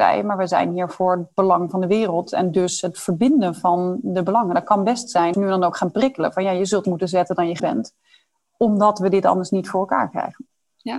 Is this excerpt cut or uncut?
cut